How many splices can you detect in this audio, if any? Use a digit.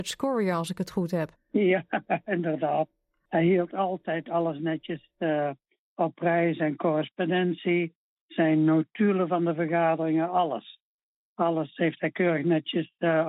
1